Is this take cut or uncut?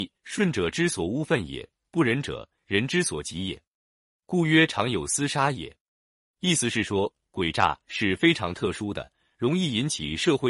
uncut